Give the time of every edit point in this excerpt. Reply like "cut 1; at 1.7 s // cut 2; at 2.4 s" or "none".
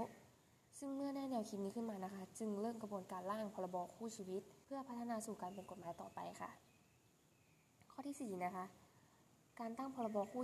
cut 1; at 4.6 s

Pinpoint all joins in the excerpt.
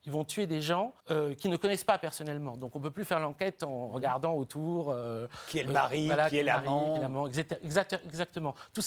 cut 1; at 1.0 s

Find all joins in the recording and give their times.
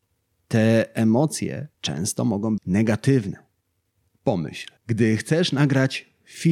cut 1; at 1.7 s // cut 2; at 2.6 s // cut 3; at 4.8 s

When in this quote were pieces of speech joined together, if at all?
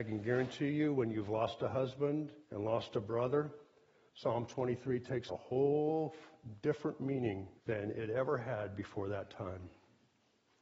cut 1; at 2.4 s // cut 2; at 5.3 s // cut 3; at 7.6 s

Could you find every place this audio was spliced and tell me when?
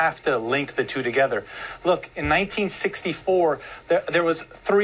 none

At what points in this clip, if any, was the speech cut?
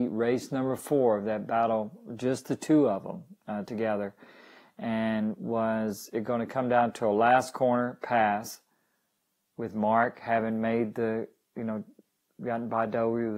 none

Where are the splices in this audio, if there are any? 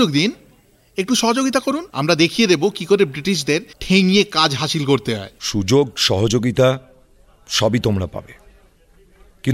cut 1; at 1.9 s // cut 2; at 3.7 s // cut 3; at 5.4 s

